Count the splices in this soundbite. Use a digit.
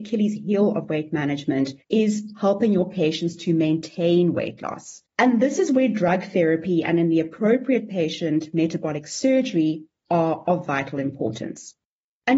2